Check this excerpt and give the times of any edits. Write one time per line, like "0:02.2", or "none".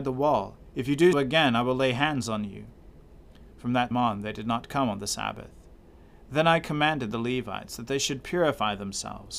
0:01.1
0:03.5
0:03.9